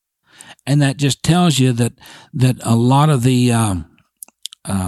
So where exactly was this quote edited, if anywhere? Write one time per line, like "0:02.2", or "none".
none